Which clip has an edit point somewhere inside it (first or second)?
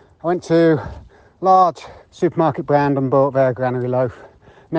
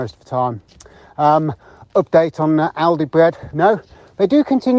first